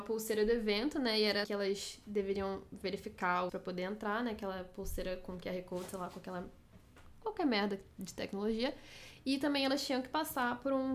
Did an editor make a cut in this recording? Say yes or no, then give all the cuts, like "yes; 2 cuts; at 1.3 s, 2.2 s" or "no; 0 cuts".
yes; 2 cuts; at 1.4 s, 3.5 s